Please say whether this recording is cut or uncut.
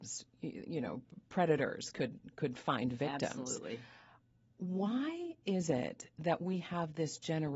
uncut